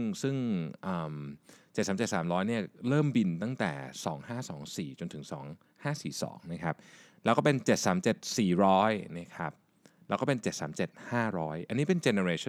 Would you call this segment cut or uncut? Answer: uncut